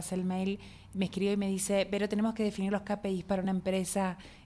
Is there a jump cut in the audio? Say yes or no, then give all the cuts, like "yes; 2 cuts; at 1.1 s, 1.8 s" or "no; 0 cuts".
no; 0 cuts